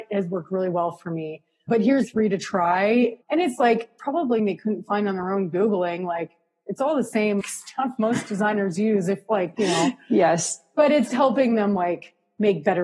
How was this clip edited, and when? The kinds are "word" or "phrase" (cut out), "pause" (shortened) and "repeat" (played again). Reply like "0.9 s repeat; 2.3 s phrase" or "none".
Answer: 1.7 s word; 2.0 s word; 3.2 s word; 4.4 s word; 7.4 s word; 11.1 s word